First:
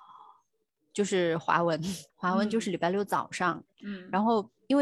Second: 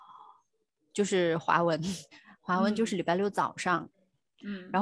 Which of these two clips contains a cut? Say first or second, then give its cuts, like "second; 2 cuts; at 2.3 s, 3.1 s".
first; 2 cuts; at 2.1 s, 3.7 s